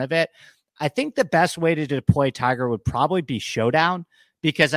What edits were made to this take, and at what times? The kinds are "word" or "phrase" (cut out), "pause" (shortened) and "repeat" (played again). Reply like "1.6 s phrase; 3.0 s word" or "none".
none